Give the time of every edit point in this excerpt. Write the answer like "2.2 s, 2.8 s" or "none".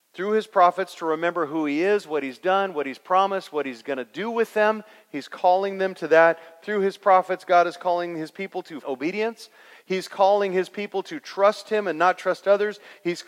8.8 s